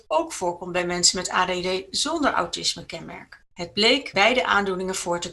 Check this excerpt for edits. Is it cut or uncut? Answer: cut